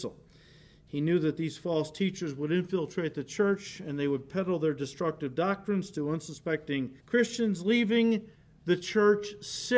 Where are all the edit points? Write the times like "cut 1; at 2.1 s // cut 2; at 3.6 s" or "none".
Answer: cut 1; at 7.0 s // cut 2; at 8.3 s